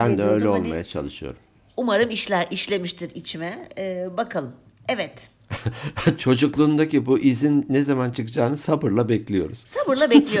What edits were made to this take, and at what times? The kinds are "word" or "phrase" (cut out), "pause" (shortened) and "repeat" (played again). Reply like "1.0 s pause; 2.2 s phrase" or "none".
none